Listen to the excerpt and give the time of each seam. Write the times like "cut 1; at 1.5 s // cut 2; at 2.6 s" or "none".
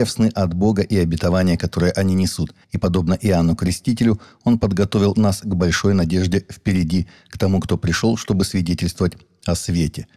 cut 1; at 2.6 s

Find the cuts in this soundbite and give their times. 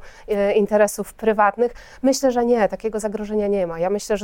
none

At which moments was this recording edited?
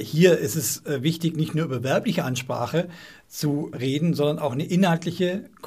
cut 1; at 3.7 s

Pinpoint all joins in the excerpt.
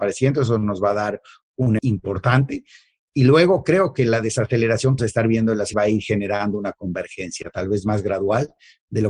cut 1; at 1.8 s // cut 2; at 5.0 s // cut 3; at 5.7 s

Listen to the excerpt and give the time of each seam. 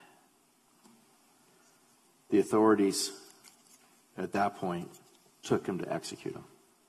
none

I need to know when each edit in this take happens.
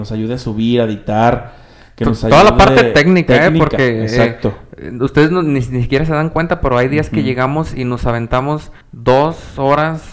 cut 1; at 8.8 s

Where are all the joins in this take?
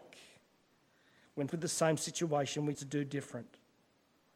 cut 1; at 1.5 s // cut 2; at 2.7 s

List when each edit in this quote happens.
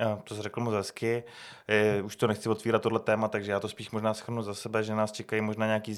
none

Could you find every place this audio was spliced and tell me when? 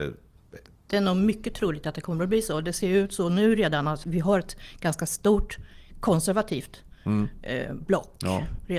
cut 1; at 4.0 s

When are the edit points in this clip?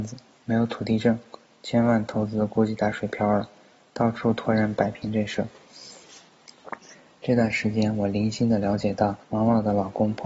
cut 1; at 9.2 s

